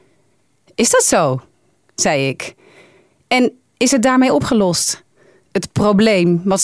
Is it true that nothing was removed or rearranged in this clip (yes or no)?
yes